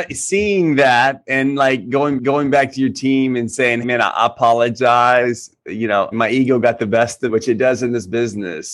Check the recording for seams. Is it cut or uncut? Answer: cut